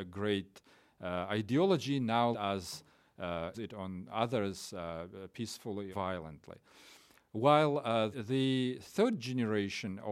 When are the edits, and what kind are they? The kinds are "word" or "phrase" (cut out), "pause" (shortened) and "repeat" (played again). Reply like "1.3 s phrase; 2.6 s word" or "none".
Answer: 2.3 s word; 3.5 s word; 5.9 s word; 8.1 s word